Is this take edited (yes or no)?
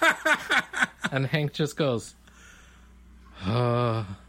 no